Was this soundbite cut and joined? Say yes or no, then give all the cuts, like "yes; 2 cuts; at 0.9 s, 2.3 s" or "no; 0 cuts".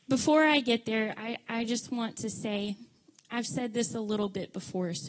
no; 0 cuts